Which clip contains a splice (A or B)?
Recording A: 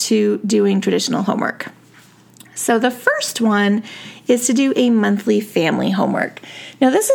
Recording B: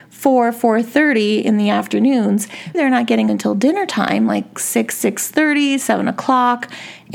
B